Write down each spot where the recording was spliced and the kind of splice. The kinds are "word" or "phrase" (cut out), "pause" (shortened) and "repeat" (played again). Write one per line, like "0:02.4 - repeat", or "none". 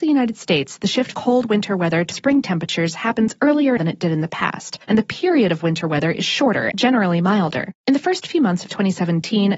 0:01.1 - word
0:02.1 - word
0:03.8 - word
0:04.8 - pause
0:06.7 - word
0:07.8 - pause